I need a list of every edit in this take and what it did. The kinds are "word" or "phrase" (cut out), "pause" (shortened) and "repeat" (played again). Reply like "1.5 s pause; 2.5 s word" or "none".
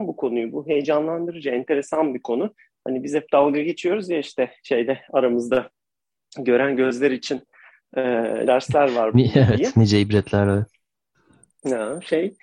8.5 s word